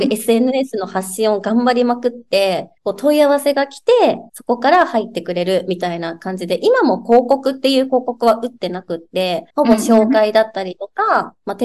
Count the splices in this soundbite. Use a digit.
3